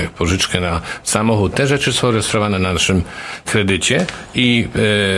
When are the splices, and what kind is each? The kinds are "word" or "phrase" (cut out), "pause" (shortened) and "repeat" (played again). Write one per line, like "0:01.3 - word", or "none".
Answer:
0:03.4 - word